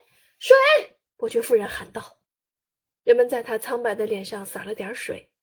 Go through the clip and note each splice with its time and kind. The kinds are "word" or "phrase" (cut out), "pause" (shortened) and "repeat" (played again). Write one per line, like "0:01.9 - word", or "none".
0:01.1 - pause
0:02.2 - pause